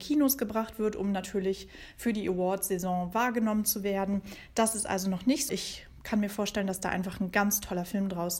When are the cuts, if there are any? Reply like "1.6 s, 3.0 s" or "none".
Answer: 5.5 s